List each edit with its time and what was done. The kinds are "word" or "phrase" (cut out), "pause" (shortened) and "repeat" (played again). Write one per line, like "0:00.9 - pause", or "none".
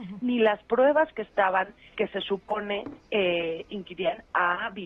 0:01.9 - word
0:03.0 - pause